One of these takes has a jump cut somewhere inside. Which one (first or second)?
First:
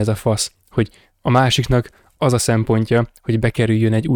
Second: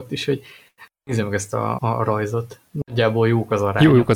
second